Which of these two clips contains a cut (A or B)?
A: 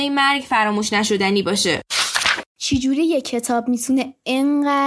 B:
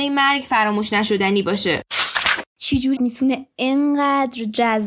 B